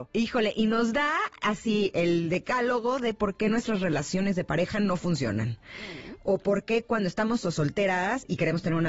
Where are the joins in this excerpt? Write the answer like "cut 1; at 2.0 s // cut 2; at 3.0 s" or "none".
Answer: cut 1; at 7.4 s